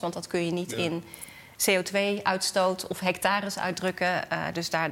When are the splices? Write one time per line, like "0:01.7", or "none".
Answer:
none